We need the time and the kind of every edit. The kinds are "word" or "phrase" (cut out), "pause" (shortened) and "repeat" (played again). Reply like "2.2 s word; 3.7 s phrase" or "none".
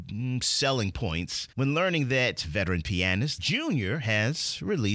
1.5 s pause; 3.4 s phrase

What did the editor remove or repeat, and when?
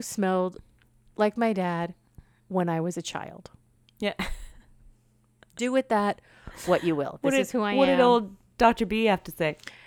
none

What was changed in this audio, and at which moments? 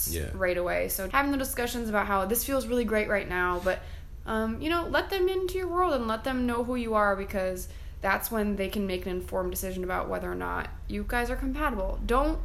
1.1 s word

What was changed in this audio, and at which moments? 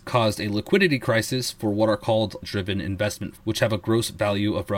2.4 s word; 3.4 s word

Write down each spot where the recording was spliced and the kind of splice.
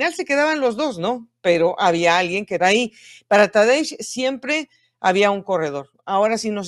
2.6 s phrase

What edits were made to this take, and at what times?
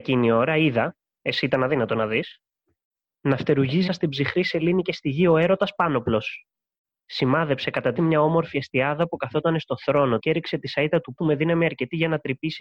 3.9 s word; 8.0 s word; 10.2 s word; 11.2 s word

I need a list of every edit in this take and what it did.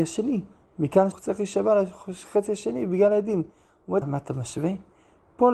1.1 s word; 4.0 s word

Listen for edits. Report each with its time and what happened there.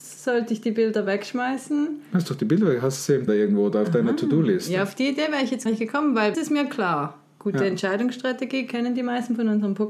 3.3 s word; 5.7 s word; 6.3 s phrase

